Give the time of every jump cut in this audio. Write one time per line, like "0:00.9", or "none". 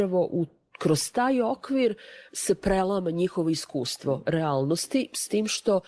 none

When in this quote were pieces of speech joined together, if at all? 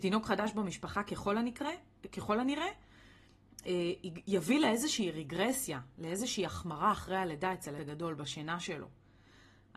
0:07.8

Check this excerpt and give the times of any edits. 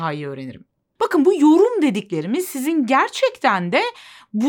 none

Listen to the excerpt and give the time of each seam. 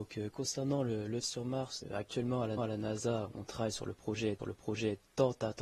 0:01.2
0:01.8
0:02.6
0:04.4

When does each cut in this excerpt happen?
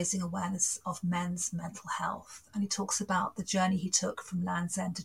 none

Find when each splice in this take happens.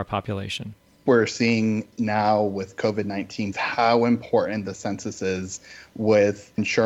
0:03.5

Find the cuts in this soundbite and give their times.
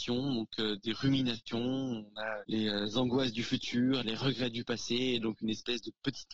none

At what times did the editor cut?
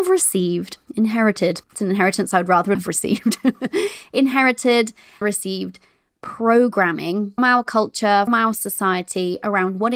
0:01.6
0:02.7
0:05.2
0:07.4
0:08.3

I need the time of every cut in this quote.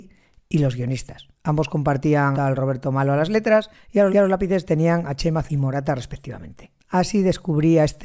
0:01.3
0:02.3
0:03.7
0:04.1
0:05.4
0:06.8

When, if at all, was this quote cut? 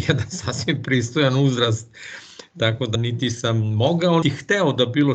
0:02.9
0:04.2

